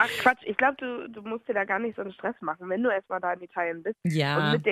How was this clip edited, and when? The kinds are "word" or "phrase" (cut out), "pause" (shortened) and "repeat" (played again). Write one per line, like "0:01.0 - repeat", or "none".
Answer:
none